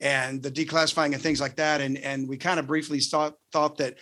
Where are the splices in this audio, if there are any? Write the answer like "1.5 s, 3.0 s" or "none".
none